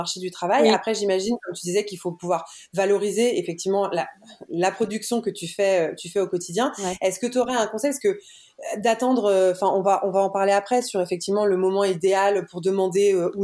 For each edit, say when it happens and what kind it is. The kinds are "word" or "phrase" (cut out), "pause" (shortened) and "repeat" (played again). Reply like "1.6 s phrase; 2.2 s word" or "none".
none